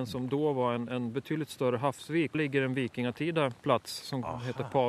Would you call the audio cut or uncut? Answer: cut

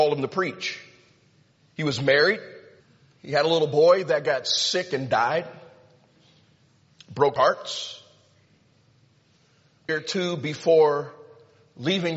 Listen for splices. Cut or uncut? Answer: cut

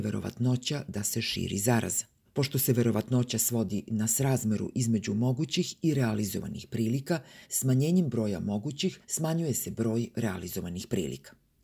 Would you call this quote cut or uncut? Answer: cut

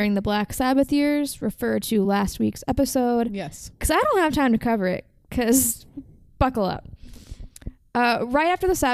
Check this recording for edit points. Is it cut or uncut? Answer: uncut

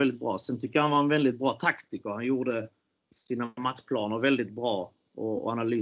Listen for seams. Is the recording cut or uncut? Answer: uncut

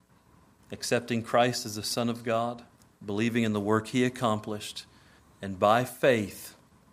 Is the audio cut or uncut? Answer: cut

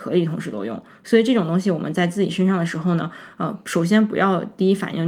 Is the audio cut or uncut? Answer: uncut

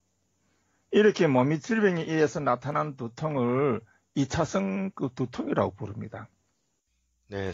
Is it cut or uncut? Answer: uncut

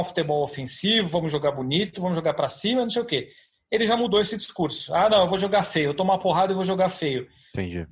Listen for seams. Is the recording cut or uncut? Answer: uncut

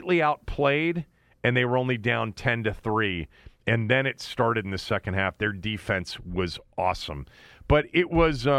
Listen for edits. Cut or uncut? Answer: uncut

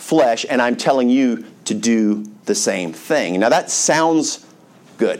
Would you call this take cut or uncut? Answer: cut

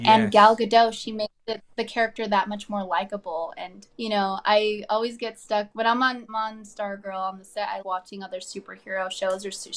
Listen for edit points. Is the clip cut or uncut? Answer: cut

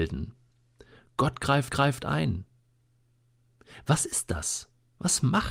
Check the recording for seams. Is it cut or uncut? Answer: cut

